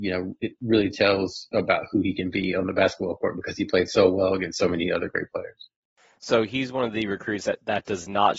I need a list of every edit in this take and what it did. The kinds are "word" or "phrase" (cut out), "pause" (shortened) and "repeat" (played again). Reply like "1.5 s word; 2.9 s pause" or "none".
none